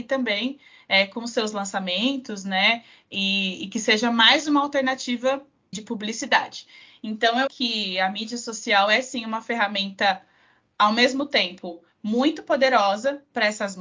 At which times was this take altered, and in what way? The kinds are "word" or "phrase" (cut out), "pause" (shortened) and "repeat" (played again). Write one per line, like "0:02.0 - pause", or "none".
0:05.7 - word
0:07.5 - word